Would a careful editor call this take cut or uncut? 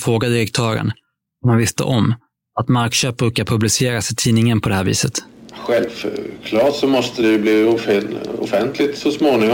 uncut